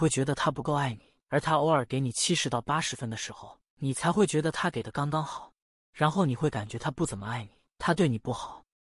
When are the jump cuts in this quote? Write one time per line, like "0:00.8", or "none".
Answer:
none